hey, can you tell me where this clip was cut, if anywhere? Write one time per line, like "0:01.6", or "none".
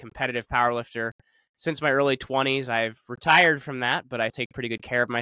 0:04.3